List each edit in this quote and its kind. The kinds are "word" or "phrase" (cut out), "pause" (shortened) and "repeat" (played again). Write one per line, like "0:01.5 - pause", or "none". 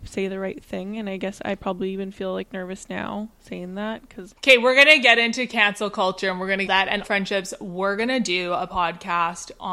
0:04.3 - word
0:06.7 - phrase
0:07.0 - word